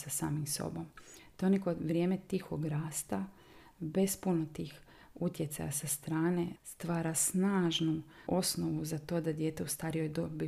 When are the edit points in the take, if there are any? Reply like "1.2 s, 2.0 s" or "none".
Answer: 6.6 s, 8.3 s